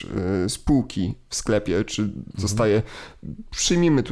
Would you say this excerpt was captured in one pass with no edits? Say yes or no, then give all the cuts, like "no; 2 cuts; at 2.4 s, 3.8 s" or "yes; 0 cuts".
yes; 0 cuts